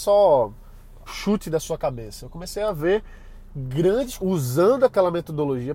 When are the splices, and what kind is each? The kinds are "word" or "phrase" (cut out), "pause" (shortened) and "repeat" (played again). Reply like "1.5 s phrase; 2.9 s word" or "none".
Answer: 1.1 s word; 4.2 s phrase

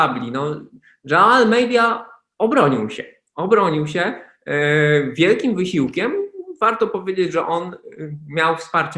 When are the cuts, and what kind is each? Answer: none

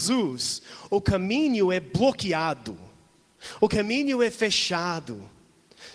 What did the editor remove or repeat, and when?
none

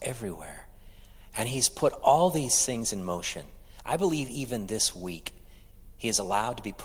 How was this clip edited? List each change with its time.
none

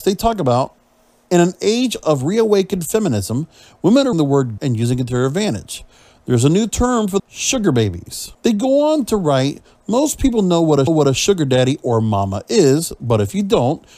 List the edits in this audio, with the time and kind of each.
4.1 s word; 4.6 s phrase; 7.2 s phrase; 8.3 s pause; 10.9 s repeat

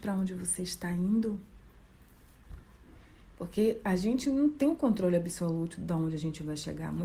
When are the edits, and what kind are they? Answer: none

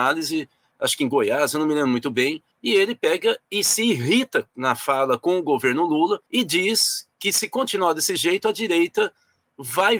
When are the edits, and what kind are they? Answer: 2.5 s pause; 6.3 s pause; 7.1 s pause

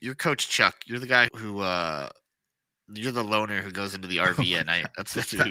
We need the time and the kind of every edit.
1.3 s word

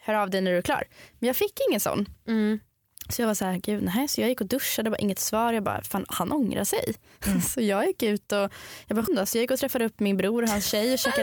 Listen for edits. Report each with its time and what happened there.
9.1 s word

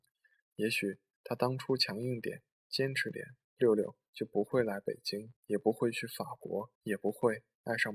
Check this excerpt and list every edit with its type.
3.4 s pause; 5.4 s pause; 6.8 s pause

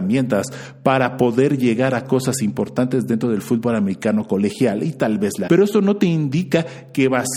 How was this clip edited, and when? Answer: 5.5 s word

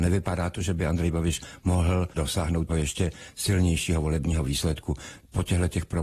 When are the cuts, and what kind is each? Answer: 2.7 s word

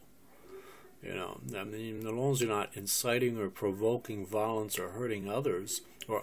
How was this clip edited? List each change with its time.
none

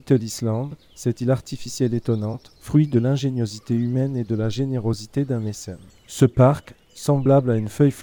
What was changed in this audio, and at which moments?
2.6 s pause; 5.9 s pause

